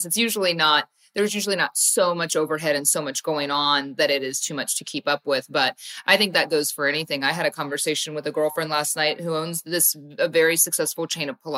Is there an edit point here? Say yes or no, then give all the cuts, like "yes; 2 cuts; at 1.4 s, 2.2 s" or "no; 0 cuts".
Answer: no; 0 cuts